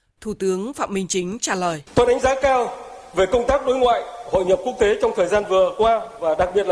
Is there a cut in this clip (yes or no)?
yes